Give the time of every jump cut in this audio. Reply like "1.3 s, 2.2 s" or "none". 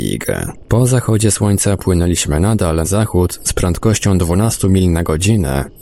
2.8 s